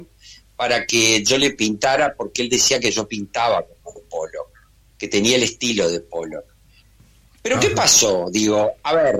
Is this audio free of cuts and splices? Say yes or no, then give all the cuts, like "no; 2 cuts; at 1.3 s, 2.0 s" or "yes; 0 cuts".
yes; 0 cuts